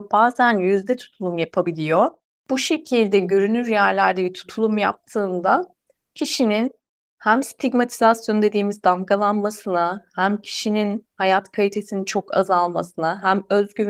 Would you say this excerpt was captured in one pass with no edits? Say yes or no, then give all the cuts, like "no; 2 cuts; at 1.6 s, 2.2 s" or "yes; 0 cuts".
yes; 0 cuts